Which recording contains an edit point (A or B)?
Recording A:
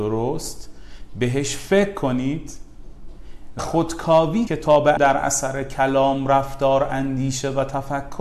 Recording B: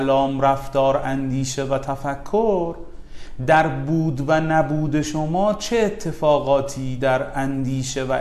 A